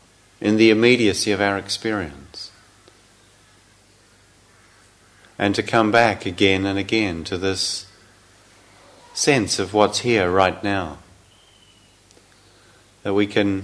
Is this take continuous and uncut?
yes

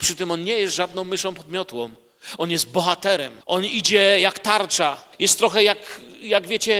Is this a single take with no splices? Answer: no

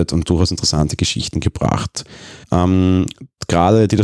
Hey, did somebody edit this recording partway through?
yes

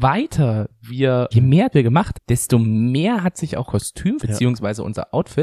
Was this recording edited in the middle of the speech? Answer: yes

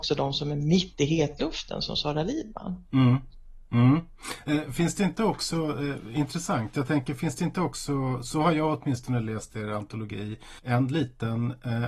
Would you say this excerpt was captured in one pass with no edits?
no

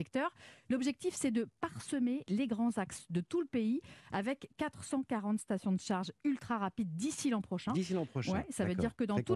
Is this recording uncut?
yes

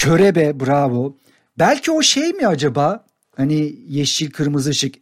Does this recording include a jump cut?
no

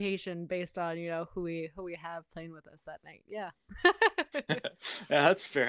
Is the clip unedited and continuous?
yes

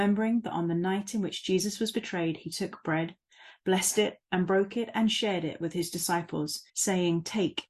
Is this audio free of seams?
no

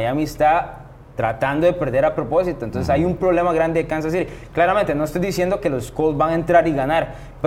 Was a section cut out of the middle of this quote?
no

